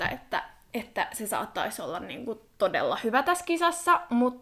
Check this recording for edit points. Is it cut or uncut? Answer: uncut